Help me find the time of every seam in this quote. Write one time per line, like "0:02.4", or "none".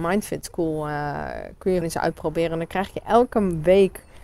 0:01.8